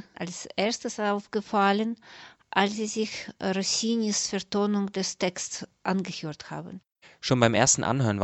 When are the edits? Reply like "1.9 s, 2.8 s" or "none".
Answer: none